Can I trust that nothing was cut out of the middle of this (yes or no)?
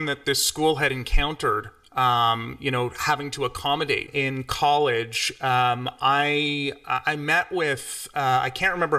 yes